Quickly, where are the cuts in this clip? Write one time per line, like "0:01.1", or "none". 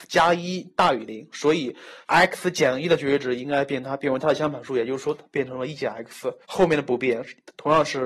0:02.0
0:06.4